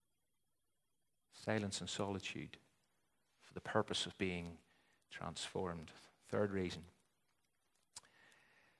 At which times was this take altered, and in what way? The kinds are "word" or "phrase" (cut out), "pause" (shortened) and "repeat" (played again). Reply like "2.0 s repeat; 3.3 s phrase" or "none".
none